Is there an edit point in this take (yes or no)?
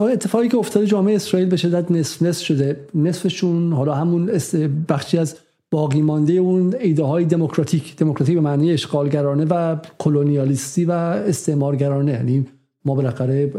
no